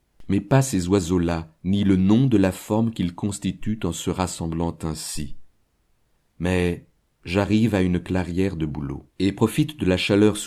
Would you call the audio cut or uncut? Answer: cut